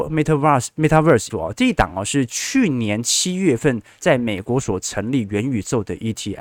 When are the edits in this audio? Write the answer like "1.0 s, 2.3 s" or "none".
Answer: 1.3 s